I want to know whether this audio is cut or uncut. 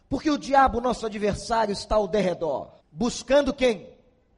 cut